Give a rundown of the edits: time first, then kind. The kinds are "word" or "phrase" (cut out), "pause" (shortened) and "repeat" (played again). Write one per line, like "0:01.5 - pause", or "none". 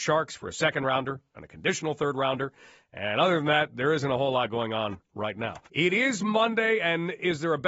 0:05.6 - pause